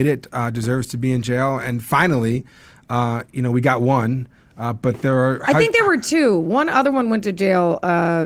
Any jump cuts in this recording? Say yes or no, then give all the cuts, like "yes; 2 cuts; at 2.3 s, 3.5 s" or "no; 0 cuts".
no; 0 cuts